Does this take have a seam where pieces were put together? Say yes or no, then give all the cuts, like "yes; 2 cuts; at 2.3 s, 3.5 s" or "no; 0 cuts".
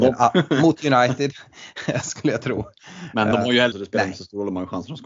yes; 2 cuts; at 3.3 s, 3.7 s